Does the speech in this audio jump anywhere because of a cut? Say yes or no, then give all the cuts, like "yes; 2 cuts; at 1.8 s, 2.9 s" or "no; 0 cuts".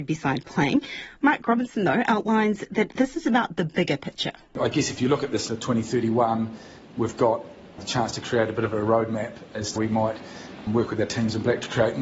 yes; 2 cuts; at 5.5 s, 9.8 s